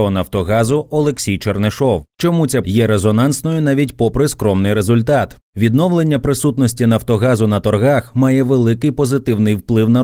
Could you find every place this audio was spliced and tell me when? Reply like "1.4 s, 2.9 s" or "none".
2.1 s, 2.6 s, 5.5 s